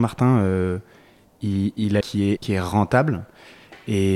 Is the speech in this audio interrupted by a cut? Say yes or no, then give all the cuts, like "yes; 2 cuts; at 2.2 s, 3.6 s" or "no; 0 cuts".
yes; 2 cuts; at 2.0 s, 2.4 s